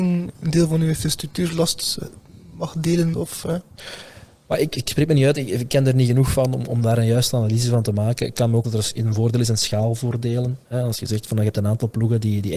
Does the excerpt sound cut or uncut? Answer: cut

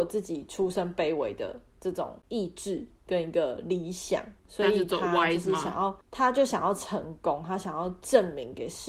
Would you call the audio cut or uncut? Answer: cut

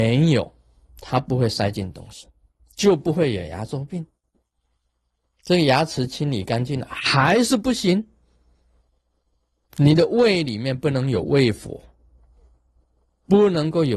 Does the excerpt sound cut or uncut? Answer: uncut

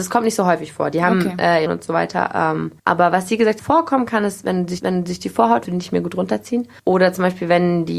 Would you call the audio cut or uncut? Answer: cut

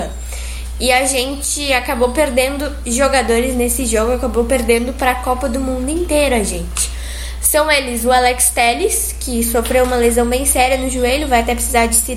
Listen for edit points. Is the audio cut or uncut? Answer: cut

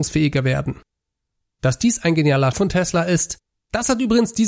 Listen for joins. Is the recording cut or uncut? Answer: cut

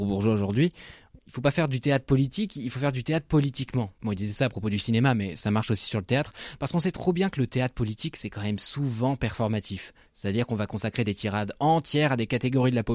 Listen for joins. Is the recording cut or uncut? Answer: uncut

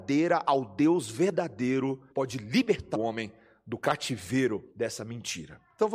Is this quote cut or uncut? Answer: cut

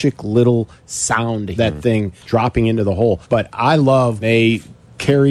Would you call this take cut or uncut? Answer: cut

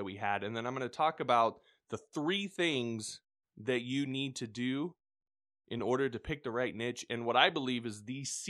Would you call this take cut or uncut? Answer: uncut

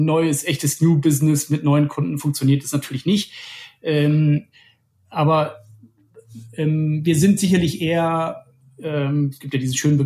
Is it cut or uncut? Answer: uncut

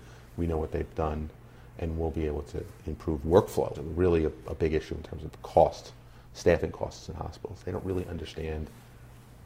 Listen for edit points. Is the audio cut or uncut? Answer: cut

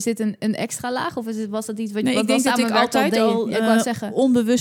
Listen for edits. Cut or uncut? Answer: uncut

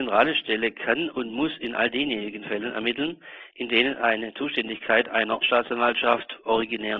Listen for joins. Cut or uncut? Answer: cut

